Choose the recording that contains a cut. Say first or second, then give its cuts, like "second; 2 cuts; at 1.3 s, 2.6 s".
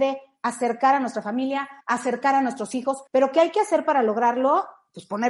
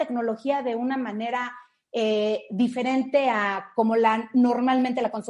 first; 2 cuts; at 1.8 s, 3.1 s